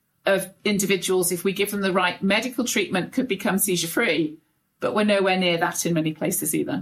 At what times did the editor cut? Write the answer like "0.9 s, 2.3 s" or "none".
none